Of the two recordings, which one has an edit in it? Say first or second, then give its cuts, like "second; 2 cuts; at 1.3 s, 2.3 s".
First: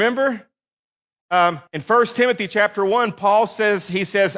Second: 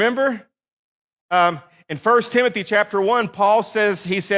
first; 1 cut; at 1.7 s